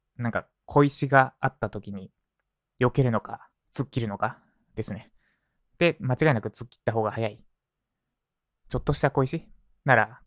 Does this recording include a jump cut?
yes; 1 cut; at 3.6 s

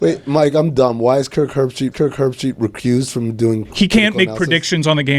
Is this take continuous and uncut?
no; 1 cut; at 1.9 s

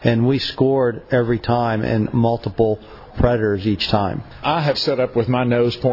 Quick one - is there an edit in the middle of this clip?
yes; 2 cuts; at 3.1 s, 4.7 s

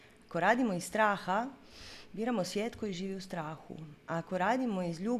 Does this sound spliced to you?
no; 0 cuts

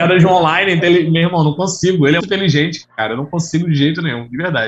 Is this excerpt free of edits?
no; 1 cut; at 2.2 s

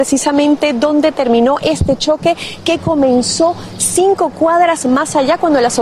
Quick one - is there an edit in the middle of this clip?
no; 0 cuts

